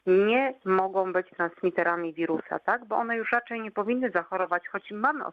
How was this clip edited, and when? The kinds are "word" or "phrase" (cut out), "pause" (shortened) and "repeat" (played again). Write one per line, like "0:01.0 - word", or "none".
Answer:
none